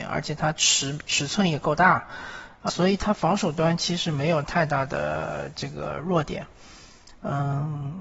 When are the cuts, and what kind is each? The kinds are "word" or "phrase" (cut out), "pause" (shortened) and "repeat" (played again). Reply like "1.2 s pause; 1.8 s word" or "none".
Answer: 2.7 s word